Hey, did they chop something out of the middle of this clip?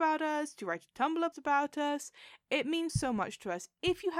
yes; 2 cuts; at 1.3 s, 2.9 s

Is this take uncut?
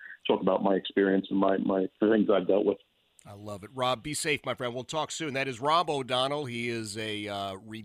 yes; 0 cuts

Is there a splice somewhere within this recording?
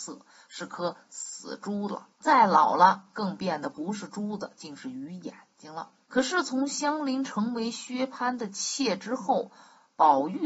yes; 2 cuts; at 2.1 s, 6.0 s

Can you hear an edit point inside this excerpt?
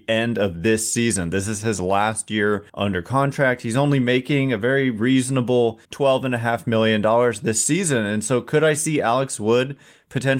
yes; 2 cuts; at 2.7 s, 5.8 s

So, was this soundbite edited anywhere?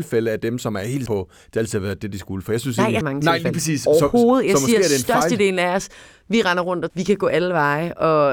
yes; 3 cuts; at 1.1 s, 3.0 s, 6.9 s

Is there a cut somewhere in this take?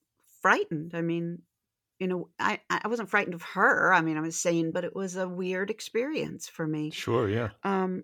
yes; 1 cut; at 4.7 s

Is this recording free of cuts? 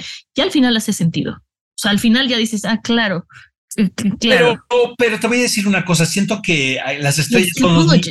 yes; 0 cuts

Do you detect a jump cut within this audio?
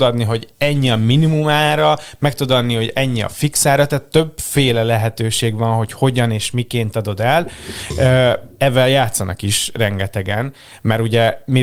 no; 0 cuts

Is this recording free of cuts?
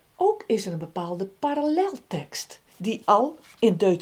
no; 1 cut; at 2.7 s

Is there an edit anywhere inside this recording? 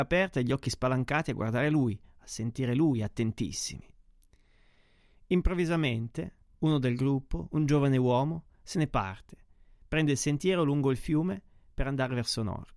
no; 0 cuts

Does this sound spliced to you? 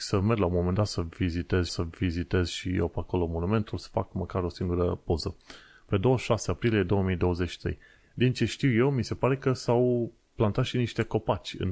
yes; 1 cut; at 1.7 s

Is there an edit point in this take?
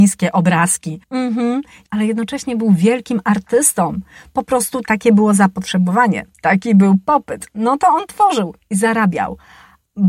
yes; 1 cut; at 1.0 s

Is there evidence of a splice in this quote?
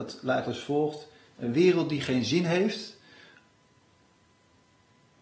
no; 0 cuts

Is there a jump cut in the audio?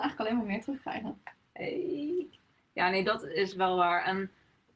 no; 0 cuts

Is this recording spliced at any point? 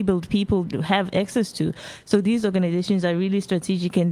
no; 0 cuts

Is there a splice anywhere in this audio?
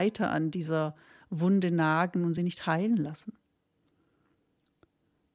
no; 0 cuts

